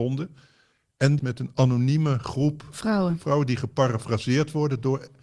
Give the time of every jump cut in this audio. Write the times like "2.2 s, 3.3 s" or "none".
1.2 s